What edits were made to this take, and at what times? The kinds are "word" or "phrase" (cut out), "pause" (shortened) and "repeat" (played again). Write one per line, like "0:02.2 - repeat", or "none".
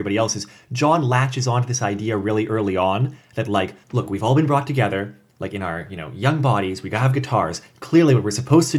0:03.8 - pause